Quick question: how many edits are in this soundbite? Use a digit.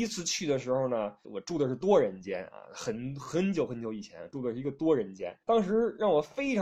2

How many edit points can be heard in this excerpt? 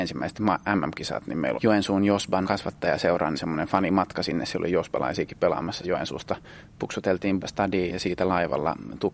6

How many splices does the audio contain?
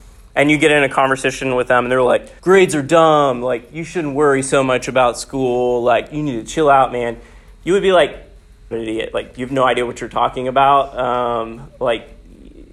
2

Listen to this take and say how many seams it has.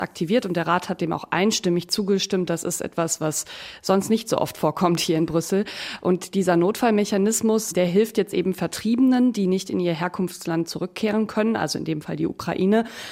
0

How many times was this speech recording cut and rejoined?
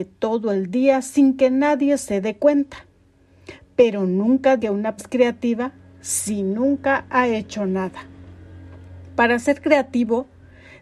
2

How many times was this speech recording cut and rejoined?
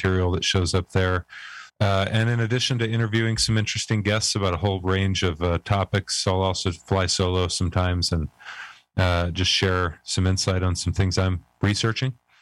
1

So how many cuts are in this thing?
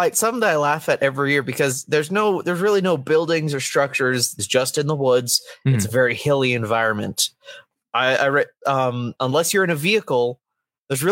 1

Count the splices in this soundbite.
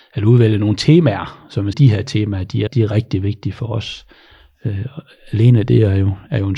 2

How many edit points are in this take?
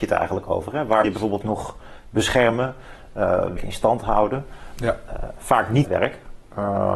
4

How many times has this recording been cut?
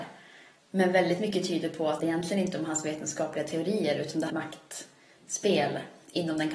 2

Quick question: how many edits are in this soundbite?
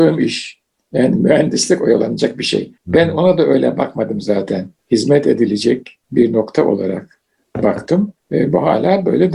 4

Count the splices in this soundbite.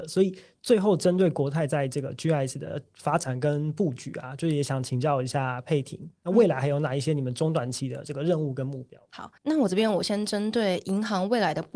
1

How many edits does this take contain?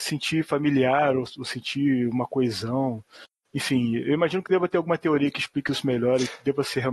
0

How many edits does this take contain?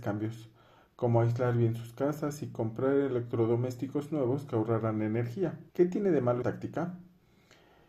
2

